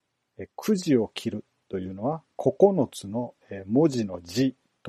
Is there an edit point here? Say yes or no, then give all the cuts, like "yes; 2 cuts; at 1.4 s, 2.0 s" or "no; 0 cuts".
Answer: no; 0 cuts